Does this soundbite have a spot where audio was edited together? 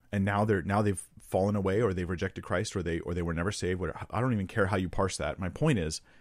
no; 0 cuts

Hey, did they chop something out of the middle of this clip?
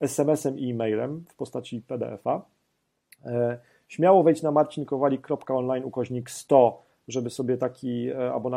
no; 0 cuts

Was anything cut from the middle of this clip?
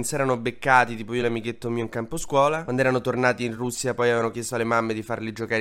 no; 0 cuts

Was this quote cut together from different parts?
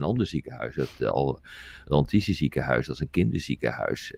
no; 0 cuts

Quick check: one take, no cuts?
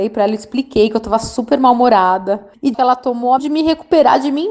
no; 2 cuts; at 2.7 s, 3.4 s

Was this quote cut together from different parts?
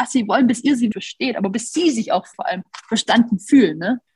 yes; 2 cuts; at 0.9 s, 2.3 s

